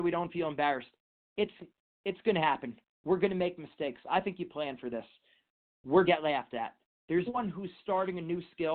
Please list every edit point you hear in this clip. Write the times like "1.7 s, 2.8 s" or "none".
6.1 s, 7.3 s